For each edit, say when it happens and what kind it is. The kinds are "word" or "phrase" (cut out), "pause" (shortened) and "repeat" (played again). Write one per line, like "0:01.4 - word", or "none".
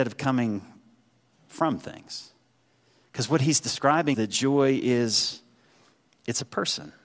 0:04.1 - word